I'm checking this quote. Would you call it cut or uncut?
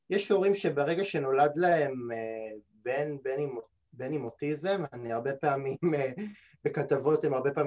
uncut